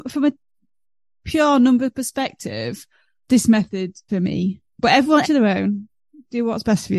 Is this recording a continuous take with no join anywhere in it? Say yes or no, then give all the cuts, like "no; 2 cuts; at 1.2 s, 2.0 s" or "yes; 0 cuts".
no; 3 cuts; at 3.3 s, 4.1 s, 5.2 s